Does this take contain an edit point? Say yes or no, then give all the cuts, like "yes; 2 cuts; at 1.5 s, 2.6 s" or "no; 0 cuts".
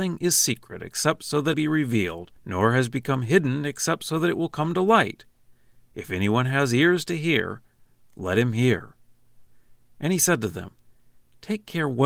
yes; 2 cuts; at 1.5 s, 2.4 s